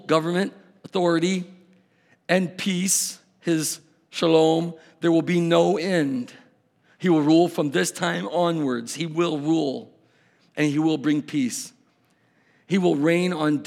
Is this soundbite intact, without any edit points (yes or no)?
yes